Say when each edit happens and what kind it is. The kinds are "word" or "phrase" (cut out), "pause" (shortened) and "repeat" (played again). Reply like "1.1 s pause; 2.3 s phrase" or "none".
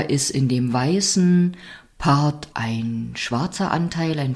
2.5 s word